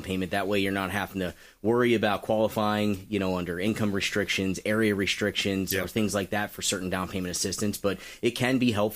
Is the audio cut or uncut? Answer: uncut